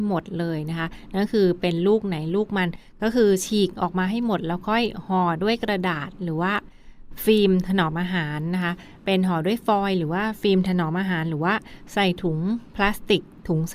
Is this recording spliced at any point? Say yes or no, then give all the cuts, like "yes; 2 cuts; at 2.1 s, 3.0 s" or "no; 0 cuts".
no; 0 cuts